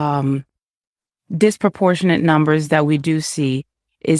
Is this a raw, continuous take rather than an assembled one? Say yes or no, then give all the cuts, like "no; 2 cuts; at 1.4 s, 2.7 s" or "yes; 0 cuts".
yes; 0 cuts